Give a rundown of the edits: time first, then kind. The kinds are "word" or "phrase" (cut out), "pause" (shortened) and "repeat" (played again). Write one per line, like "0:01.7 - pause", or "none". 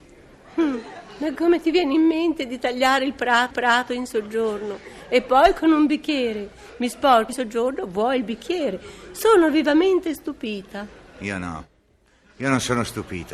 0:03.5 - repeat
0:07.3 - word

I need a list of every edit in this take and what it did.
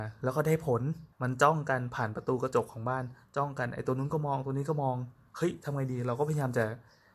0:01.1 - pause

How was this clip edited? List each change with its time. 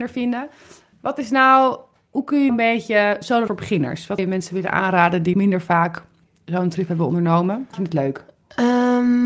0:02.5 - word
0:03.5 - word
0:04.2 - word
0:05.3 - word
0:07.7 - word

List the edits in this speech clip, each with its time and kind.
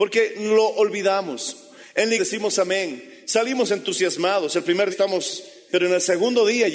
0:02.2 - word
0:04.9 - word
0:05.7 - word

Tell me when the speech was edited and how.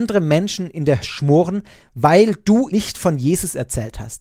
0:01.0 - word
0:02.7 - word

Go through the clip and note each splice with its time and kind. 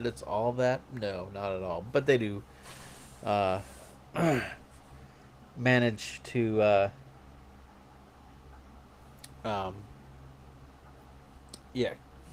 none

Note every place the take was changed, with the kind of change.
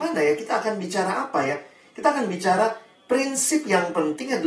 none

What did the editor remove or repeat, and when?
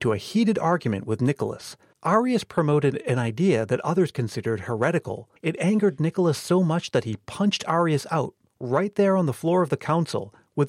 0:05.4 - pause

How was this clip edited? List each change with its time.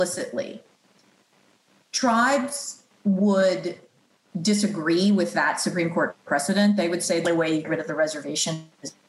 0:07.2 - word
0:07.6 - phrase

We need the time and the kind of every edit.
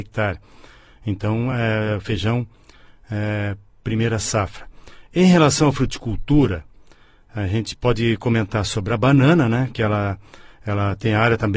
none

